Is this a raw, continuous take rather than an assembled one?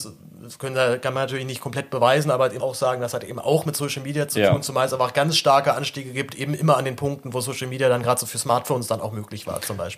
no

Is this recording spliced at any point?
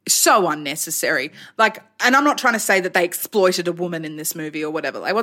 no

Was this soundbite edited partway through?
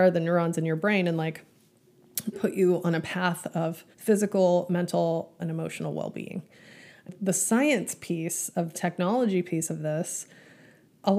yes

